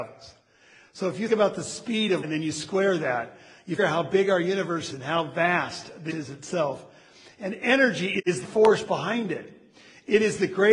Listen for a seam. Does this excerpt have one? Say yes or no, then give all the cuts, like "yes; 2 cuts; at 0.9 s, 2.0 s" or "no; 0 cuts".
yes; 6 cuts; at 1.3 s, 2.2 s, 3.8 s, 4.9 s, 6.1 s, 8.4 s